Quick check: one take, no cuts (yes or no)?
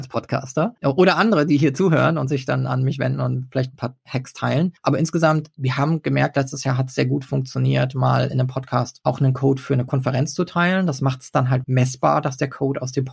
no